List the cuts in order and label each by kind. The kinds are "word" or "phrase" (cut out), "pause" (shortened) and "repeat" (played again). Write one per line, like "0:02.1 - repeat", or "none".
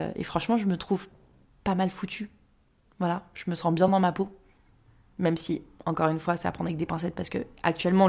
none